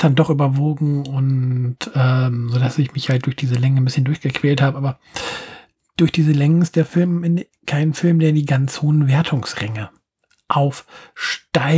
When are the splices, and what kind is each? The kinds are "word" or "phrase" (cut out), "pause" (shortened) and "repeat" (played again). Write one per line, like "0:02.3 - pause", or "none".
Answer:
none